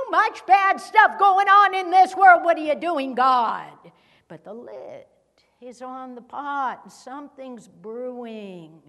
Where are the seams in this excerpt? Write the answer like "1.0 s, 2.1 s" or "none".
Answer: none

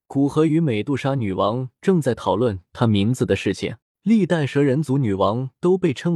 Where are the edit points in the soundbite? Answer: 3.8 s

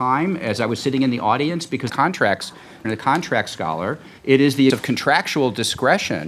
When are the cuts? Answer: 1.9 s, 2.8 s, 4.2 s, 4.7 s

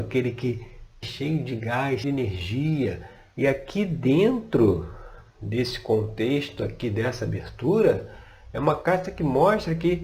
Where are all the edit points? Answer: 1.0 s, 2.0 s

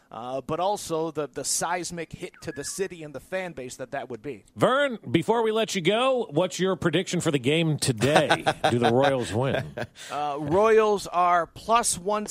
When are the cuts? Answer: 4.5 s

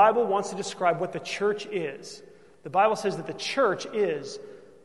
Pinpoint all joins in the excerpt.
none

